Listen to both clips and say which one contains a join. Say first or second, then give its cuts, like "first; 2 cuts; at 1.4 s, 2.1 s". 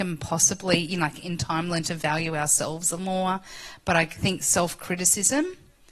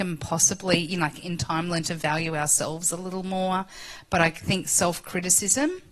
first; 1 cut; at 3.0 s